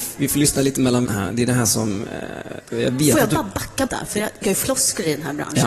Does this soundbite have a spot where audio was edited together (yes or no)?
yes